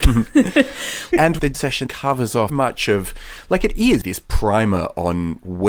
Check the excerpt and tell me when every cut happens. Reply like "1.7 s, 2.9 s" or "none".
1.5 s, 1.9 s, 2.5 s, 4.0 s